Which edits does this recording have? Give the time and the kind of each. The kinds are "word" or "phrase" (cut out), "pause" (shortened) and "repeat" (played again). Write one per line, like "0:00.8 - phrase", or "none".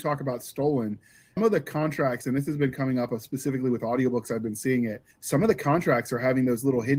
0:01.4 - word
0:05.1 - pause